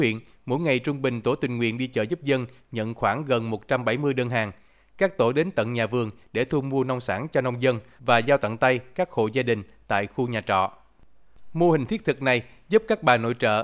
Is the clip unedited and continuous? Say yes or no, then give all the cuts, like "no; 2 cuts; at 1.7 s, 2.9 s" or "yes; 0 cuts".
yes; 0 cuts